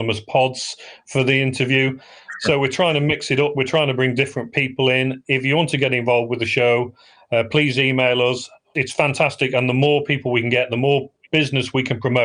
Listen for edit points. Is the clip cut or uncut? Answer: uncut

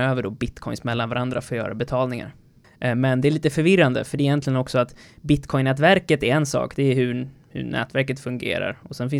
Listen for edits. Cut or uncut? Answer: cut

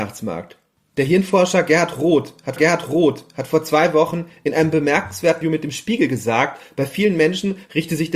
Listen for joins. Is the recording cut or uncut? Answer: cut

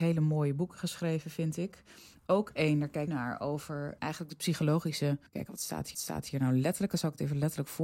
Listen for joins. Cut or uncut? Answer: cut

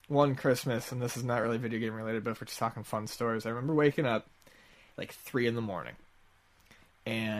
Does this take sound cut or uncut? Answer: uncut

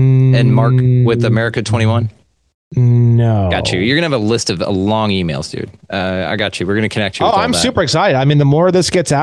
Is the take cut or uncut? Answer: uncut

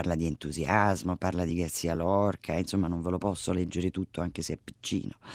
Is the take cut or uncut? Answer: uncut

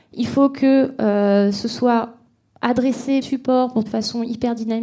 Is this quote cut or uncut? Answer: cut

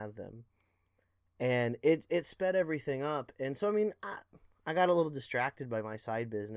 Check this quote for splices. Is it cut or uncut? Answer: uncut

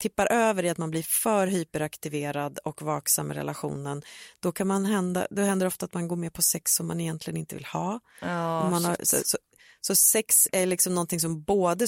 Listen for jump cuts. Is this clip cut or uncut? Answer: uncut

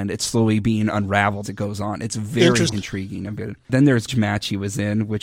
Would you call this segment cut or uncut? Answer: cut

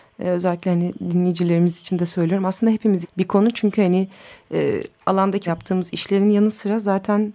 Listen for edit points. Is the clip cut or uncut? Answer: cut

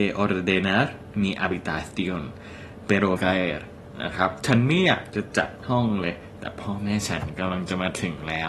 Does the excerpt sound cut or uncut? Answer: cut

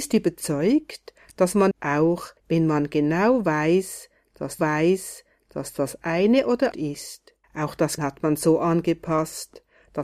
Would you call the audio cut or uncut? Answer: cut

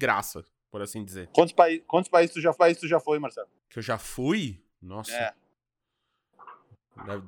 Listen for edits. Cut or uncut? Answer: cut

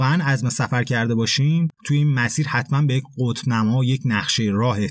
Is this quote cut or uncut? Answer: cut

